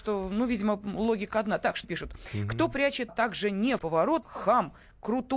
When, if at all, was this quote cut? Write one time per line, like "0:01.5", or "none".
0:01.8
0:03.1
0:03.8
0:04.2

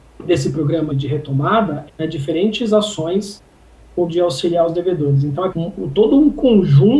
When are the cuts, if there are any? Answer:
0:00.9
0:01.9
0:04.1
0:05.5

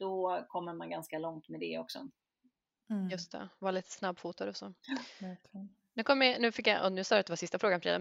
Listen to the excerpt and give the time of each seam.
none

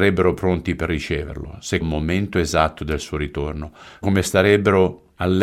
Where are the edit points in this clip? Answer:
0:01.8
0:04.0

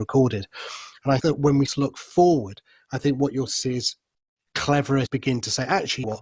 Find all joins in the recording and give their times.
0:01.2
0:01.6
0:03.5
0:05.0

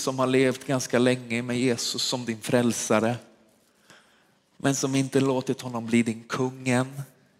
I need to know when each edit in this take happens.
none

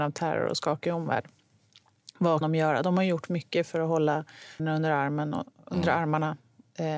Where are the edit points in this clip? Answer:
0:02.4
0:03.3
0:04.6

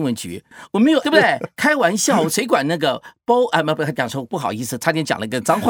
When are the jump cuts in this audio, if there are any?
0:01.0

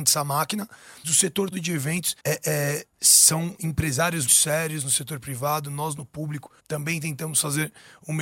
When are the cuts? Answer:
0:01.0
0:01.5
0:02.2
0:04.3
0:06.6

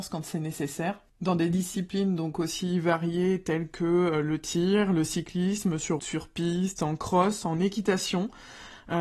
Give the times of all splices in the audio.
0:06.0

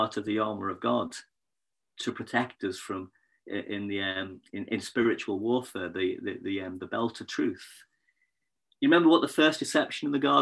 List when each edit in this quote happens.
none

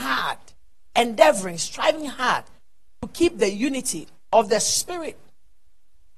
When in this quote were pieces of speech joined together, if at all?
none

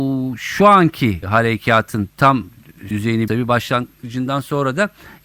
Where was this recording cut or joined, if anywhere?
0:01.2
0:02.9
0:03.3

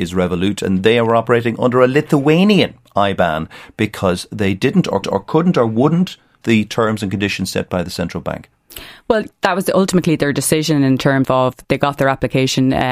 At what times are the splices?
0:05.0
0:06.4
0:11.2

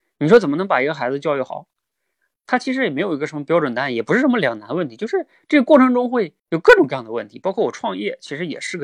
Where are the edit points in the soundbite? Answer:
0:06.4

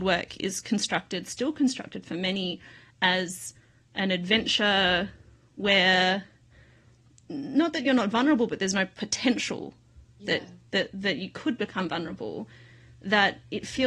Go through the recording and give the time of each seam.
none

